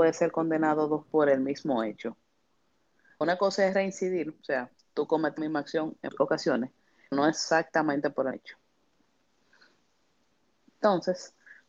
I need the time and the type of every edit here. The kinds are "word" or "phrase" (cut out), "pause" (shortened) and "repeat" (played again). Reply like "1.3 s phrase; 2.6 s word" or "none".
1.0 s word; 3.2 s word; 5.4 s word; 6.1 s word; 7.1 s word; 8.3 s word